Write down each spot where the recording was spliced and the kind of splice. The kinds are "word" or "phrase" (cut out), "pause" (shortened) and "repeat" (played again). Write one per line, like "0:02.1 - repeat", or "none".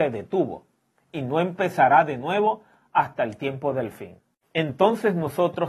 none